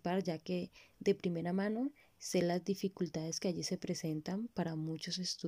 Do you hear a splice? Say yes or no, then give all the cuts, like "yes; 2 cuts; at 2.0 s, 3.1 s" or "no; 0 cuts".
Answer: no; 0 cuts